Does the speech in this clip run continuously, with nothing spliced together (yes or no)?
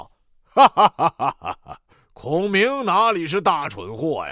no